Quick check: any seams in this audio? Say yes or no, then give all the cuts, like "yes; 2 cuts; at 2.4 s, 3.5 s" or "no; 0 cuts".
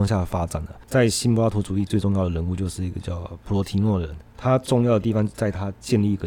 no; 0 cuts